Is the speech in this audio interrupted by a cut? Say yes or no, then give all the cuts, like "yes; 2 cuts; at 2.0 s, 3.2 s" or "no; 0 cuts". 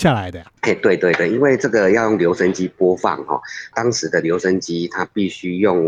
no; 0 cuts